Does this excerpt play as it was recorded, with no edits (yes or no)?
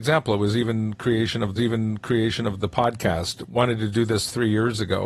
no